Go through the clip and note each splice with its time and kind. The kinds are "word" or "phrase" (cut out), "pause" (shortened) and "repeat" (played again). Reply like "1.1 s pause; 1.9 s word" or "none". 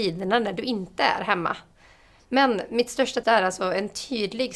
3.2 s word